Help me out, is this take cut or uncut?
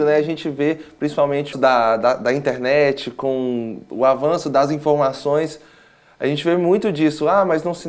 cut